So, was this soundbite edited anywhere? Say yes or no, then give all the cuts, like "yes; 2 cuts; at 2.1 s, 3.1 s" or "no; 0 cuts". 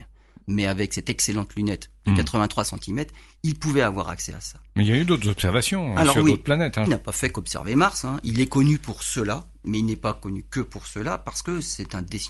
yes; 1 cut; at 6.9 s